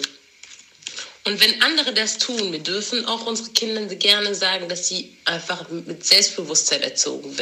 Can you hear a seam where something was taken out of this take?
no; 0 cuts

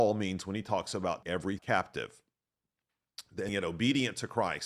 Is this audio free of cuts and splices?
no; 3 cuts; at 1.2 s, 1.6 s, 3.5 s

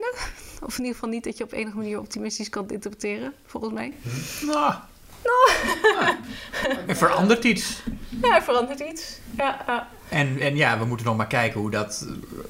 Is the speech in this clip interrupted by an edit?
no; 0 cuts

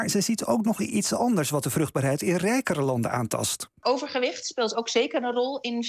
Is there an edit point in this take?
no; 0 cuts

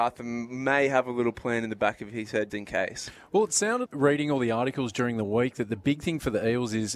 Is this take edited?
yes; 2 cuts; at 2.5 s, 3.9 s

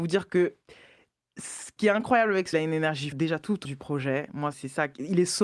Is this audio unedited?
no; 5 cuts; at 1.8 s, 2.5 s, 3.1 s, 3.6 s, 4.5 s

